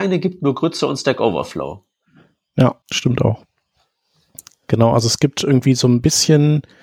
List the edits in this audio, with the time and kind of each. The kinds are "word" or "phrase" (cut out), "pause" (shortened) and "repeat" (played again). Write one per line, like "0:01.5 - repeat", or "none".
0:02.8 - pause

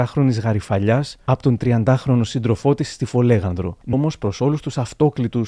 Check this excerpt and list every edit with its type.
0:03.9 - word

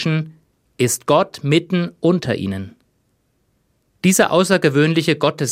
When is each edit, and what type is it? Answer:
none

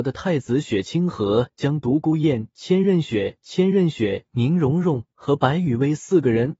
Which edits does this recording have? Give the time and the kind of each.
0:03.4 - repeat

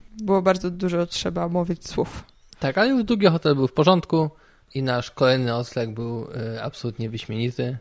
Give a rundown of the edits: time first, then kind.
none

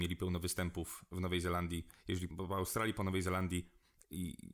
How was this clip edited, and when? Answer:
0:02.3 - phrase

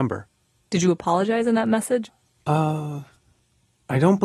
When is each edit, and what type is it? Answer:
none

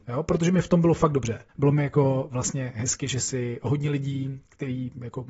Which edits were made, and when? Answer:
0:01.5 - pause

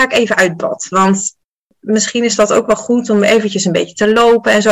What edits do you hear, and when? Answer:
none

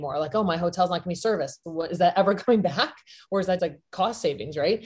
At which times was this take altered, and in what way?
0:03.6 - word

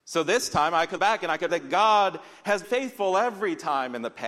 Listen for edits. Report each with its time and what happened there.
0:01.0 - word
0:01.5 - word
0:02.6 - word

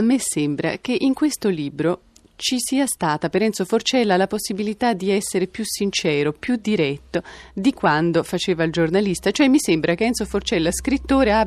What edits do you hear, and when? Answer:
none

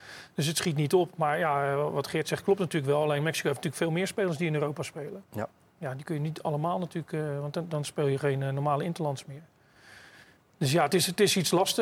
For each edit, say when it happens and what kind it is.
none

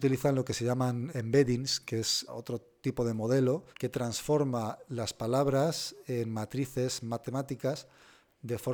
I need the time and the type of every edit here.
0:01.1 - word
0:02.3 - word
0:03.7 - pause

